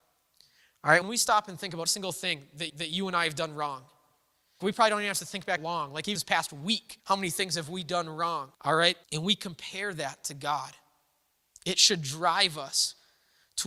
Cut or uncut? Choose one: cut